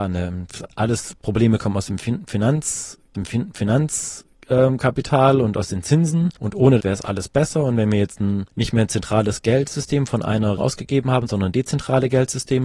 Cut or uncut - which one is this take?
cut